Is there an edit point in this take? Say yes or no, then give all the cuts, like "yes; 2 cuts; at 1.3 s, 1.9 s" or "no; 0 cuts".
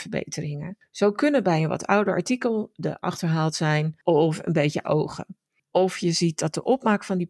yes; 2 cuts; at 3.0 s, 4.8 s